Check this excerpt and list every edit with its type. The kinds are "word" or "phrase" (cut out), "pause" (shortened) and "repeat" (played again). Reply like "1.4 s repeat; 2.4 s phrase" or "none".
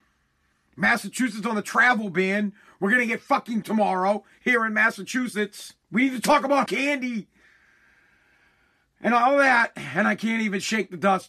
3.6 s word; 5.8 s pause; 6.7 s word